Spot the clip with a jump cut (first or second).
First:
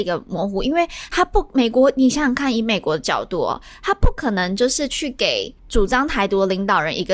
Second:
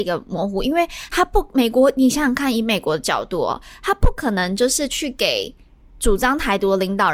first